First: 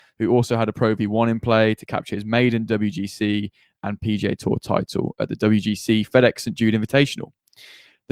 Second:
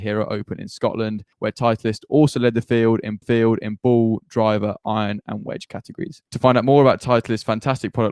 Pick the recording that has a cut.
second; 3 cuts; at 1.3 s, 3.2 s, 6.3 s

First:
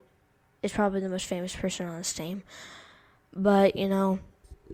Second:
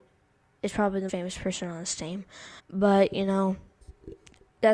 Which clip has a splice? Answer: second; 2 cuts; at 1.1 s, 2.6 s

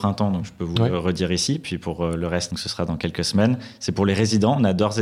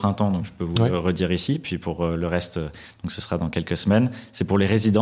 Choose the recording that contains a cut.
first; 1 cut; at 2.5 s

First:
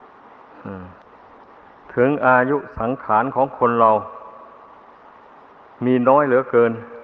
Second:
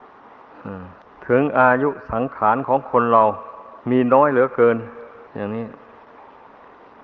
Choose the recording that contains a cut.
second; 3 cuts; at 1.1 s, 3.8 s, 5.3 s

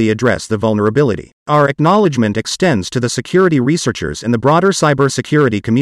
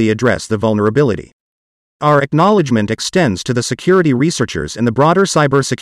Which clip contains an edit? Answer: first; 1 cut; at 1.4 s

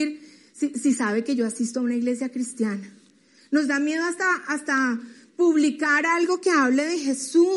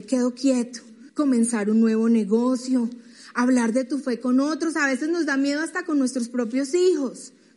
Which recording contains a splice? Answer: second; 1 cut; at 1.1 s

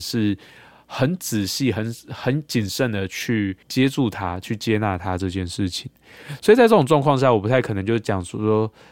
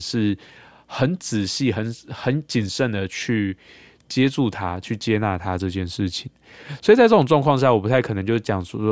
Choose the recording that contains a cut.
first; 1 cut; at 3.6 s

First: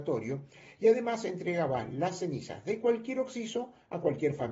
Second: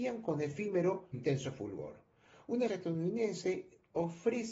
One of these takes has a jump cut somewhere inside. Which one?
second; 2 cuts; at 1.1 s, 2.7 s

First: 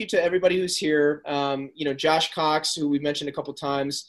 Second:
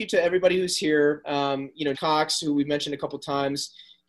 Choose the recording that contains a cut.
second; 1 cut; at 1.9 s

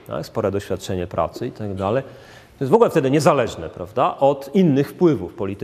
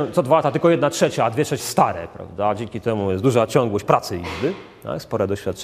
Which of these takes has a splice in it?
second; 1 cut; at 1.6 s

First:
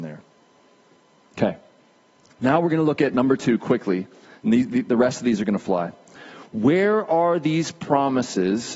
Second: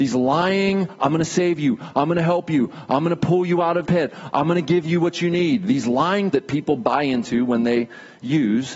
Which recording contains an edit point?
second; 2 cuts; at 3.8 s, 6.3 s

